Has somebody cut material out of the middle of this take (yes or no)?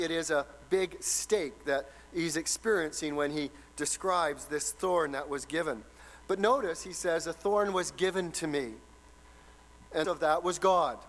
yes